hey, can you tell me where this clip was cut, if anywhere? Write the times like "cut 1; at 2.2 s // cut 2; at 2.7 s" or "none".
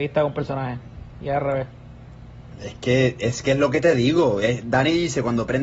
none

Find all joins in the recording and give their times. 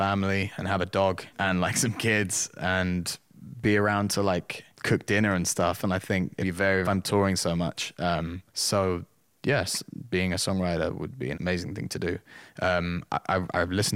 cut 1; at 1.3 s // cut 2; at 4.7 s // cut 3; at 6.4 s // cut 4; at 6.8 s // cut 5; at 8.5 s // cut 6; at 11.3 s

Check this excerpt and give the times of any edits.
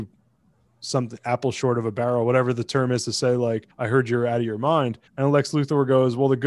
cut 1; at 3.7 s // cut 2; at 5.1 s

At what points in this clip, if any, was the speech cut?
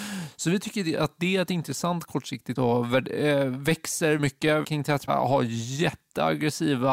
cut 1; at 2.6 s // cut 2; at 4.2 s // cut 3; at 4.6 s // cut 4; at 5.1 s

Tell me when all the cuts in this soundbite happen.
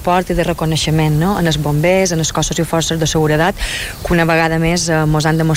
none

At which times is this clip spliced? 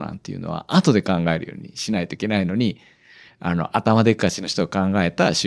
none

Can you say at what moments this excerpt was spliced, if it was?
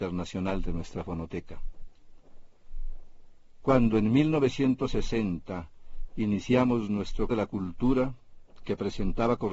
cut 1; at 7.3 s

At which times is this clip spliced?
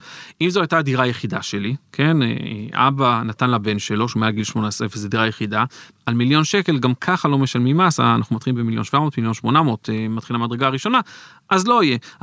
none

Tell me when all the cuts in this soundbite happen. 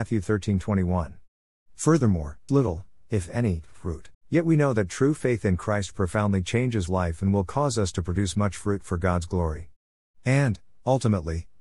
cut 1; at 2.5 s // cut 2; at 4.1 s // cut 3; at 6.9 s

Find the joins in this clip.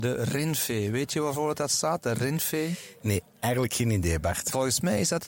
none

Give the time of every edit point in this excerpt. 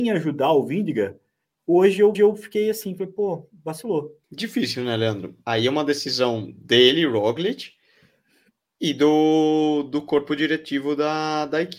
cut 1; at 2.1 s // cut 2; at 4.2 s

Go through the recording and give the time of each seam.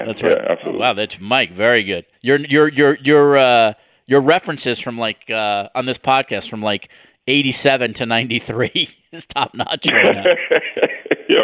cut 1; at 1.2 s // cut 2; at 2.1 s

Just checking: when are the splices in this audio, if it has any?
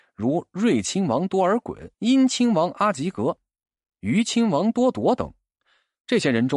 cut 1; at 1.9 s

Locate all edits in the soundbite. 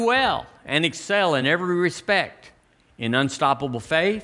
none

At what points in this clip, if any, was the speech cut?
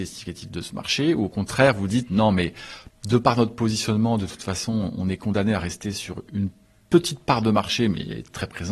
none

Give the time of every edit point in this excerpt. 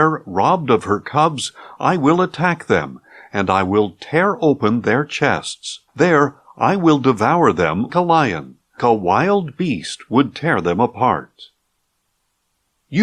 cut 1; at 5.9 s // cut 2; at 7.9 s // cut 3; at 8.8 s

